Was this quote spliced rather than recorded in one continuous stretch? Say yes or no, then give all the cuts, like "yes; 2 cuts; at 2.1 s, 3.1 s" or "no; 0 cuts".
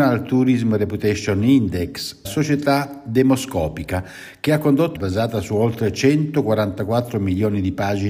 yes; 2 cuts; at 2.2 s, 4.9 s